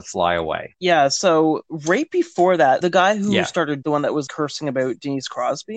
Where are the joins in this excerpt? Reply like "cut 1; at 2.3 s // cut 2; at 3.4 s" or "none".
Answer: cut 1; at 2.8 s // cut 2; at 3.8 s // cut 3; at 4.3 s

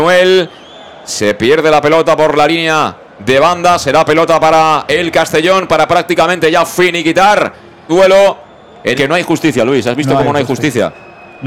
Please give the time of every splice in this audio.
cut 1; at 7.9 s // cut 2; at 8.9 s

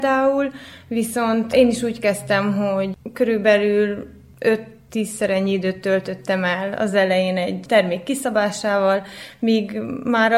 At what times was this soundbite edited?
none

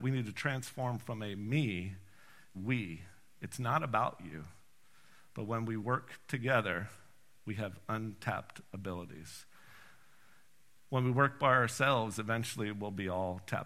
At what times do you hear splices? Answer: cut 1; at 2.5 s

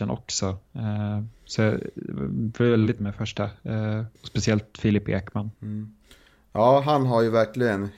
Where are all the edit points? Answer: cut 1; at 3.0 s // cut 2; at 4.2 s // cut 3; at 5.6 s

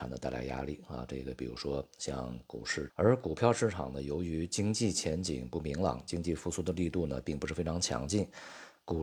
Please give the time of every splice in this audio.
cut 1; at 2.9 s

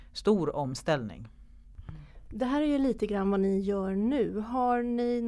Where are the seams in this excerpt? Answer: none

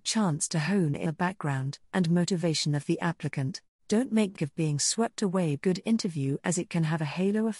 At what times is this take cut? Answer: cut 1; at 1.1 s // cut 2; at 1.8 s // cut 3; at 3.8 s // cut 4; at 4.4 s // cut 5; at 5.6 s

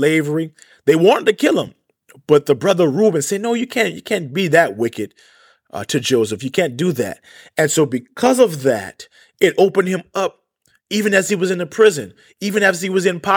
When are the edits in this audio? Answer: none

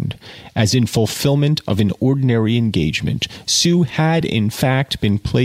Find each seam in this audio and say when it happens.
none

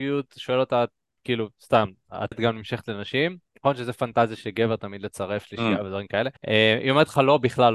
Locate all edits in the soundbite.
cut 1; at 2.3 s // cut 2; at 6.4 s

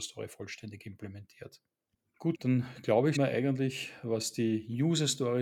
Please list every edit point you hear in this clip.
cut 1; at 2.3 s // cut 2; at 3.2 s

